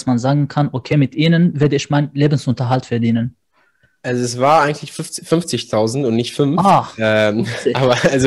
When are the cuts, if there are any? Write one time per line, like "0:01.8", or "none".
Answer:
none